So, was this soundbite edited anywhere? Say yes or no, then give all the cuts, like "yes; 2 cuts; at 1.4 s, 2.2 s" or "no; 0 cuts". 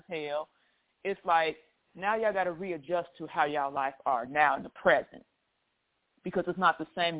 no; 0 cuts